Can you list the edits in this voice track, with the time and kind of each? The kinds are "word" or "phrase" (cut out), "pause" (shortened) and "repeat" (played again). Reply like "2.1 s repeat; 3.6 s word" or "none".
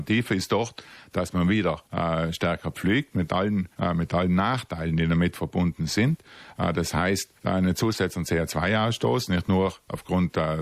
1.8 s pause; 3.7 s pause; 7.4 s pause